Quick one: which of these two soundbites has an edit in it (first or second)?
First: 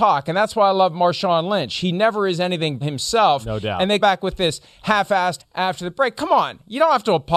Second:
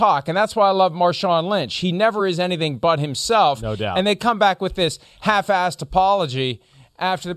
first